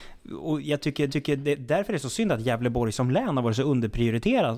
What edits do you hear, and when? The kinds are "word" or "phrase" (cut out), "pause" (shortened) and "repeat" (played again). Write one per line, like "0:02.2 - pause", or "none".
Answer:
0:01.1 - repeat